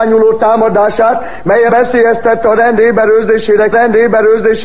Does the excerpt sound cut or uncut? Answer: cut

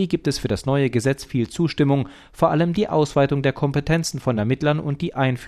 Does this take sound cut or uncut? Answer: uncut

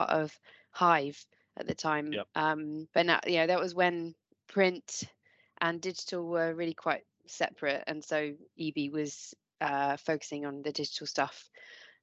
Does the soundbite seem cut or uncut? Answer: cut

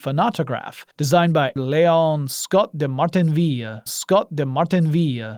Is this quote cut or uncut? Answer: cut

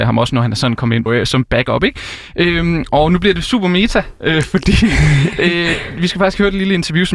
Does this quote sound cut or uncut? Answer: cut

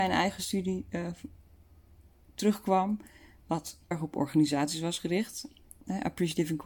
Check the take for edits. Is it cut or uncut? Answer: cut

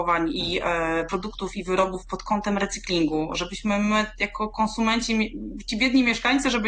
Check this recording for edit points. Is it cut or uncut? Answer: uncut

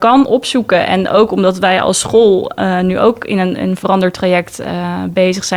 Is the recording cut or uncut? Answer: uncut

